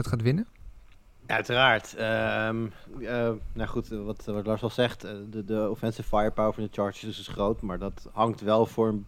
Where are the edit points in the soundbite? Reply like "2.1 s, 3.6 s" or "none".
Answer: none